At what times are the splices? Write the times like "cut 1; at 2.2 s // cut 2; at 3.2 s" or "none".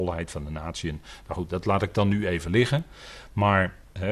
none